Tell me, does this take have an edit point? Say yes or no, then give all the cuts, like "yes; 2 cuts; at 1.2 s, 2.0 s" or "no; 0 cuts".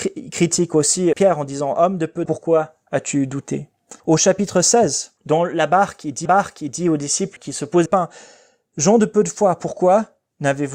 yes; 7 cuts; at 1.1 s, 2.3 s, 4.0 s, 5.2 s, 6.3 s, 7.4 s, 7.9 s